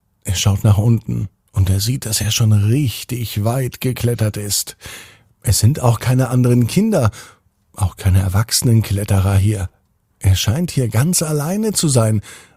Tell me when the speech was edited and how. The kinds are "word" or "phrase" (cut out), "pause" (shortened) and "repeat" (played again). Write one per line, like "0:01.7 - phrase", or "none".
none